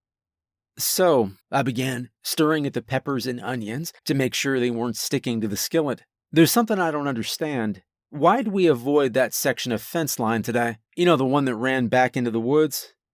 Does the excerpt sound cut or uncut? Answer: cut